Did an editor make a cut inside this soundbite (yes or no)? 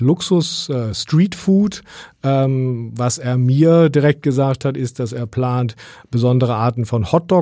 no